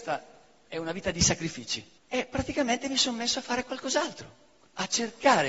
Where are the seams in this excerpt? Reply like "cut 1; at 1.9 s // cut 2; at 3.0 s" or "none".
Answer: cut 1; at 2.0 s